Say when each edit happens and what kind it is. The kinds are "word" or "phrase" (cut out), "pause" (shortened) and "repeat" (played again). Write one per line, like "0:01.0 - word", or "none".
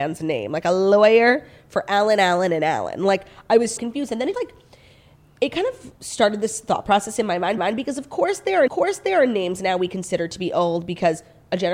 0:03.8 - word
0:04.3 - word
0:06.0 - pause
0:07.6 - repeat
0:08.7 - repeat